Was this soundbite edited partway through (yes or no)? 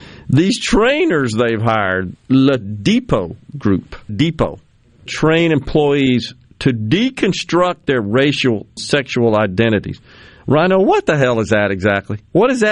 yes